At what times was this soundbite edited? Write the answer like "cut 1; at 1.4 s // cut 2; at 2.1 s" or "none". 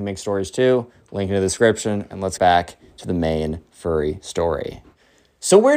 cut 1; at 2.4 s